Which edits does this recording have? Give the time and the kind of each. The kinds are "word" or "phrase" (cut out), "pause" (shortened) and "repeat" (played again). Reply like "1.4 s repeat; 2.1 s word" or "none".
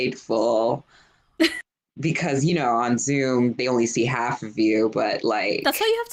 none